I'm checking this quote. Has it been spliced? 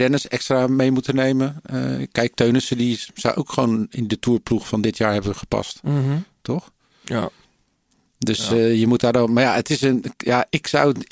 no; 0 cuts

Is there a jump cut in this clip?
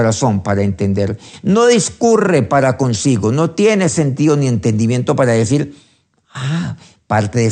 no; 0 cuts

